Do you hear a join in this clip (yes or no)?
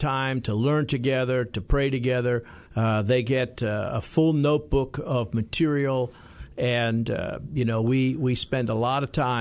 yes